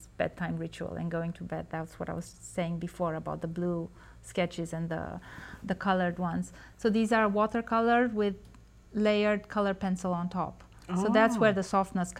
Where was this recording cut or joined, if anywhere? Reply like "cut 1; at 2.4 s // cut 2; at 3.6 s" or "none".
none